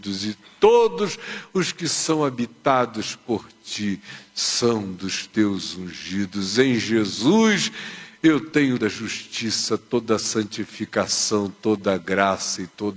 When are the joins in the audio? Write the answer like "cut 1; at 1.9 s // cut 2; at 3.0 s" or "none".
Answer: cut 1; at 8.8 s